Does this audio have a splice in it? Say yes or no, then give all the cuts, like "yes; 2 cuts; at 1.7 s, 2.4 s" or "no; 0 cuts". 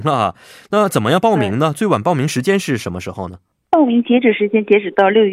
no; 0 cuts